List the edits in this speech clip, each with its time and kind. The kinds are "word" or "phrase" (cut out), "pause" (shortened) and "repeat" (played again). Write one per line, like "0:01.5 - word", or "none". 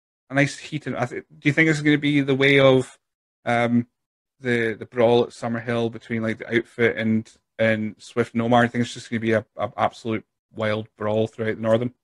0:10.4 - pause